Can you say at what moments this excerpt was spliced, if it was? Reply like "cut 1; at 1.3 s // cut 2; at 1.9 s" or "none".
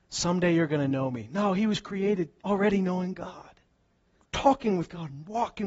cut 1; at 2.4 s // cut 2; at 4.2 s